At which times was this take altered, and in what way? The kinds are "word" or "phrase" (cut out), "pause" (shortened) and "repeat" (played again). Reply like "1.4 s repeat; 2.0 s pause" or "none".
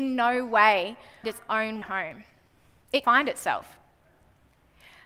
1.2 s word; 1.8 s word; 3.0 s word